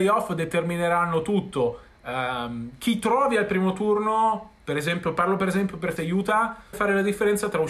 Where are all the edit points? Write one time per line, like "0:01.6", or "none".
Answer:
0:06.0
0:06.7